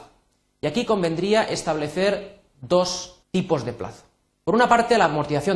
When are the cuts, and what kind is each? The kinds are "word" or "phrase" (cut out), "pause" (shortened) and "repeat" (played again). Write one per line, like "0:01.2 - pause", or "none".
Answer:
0:03.2 - pause
0:04.3 - pause